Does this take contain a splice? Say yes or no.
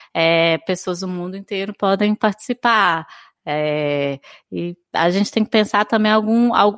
no